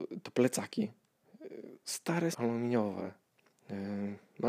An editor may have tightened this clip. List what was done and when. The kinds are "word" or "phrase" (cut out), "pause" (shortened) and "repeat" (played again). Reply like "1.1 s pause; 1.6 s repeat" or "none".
2.3 s word